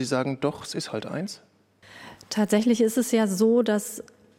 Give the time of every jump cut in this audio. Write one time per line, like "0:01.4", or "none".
none